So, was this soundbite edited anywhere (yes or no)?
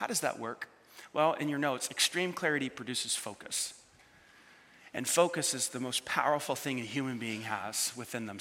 no